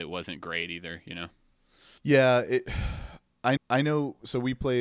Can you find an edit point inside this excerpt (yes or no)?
yes